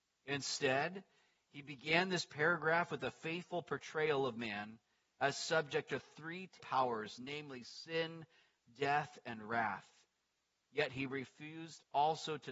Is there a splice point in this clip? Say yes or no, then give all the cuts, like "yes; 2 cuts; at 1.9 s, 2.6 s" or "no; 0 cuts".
yes; 1 cut; at 6.6 s